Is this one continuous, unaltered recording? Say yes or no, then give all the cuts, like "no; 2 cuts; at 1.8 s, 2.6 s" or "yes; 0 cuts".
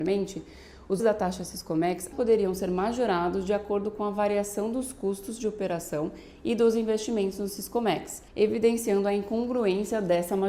no; 3 cuts; at 1.0 s, 2.1 s, 8.3 s